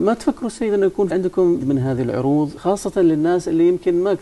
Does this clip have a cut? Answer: yes; 3 cuts; at 1.1 s, 1.6 s, 2.6 s

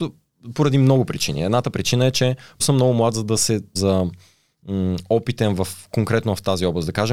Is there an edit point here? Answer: yes; 2 cuts; at 2.6 s, 3.8 s

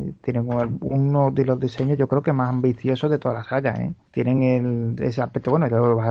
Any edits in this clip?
no; 0 cuts

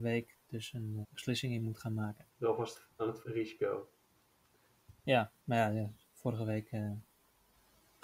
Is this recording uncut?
no; 4 cuts; at 1.0 s, 2.3 s, 3.2 s, 5.4 s

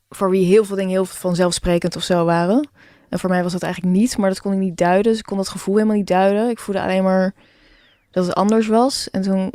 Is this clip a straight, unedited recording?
yes; 0 cuts

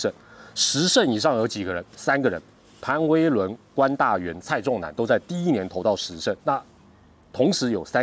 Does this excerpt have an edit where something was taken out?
yes; 1 cut; at 6.4 s

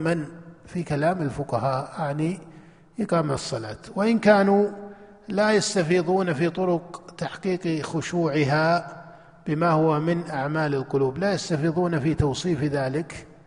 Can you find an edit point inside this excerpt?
no; 0 cuts

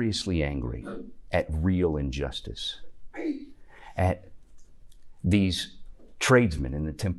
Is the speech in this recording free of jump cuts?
yes; 0 cuts

